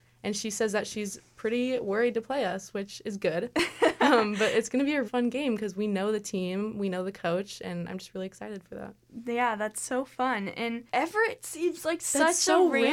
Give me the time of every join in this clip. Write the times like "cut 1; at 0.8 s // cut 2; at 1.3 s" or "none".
cut 1; at 5.0 s // cut 2; at 10.9 s